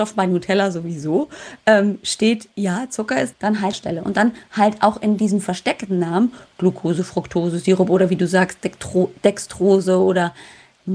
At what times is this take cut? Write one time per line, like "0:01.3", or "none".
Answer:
0:03.3
0:03.7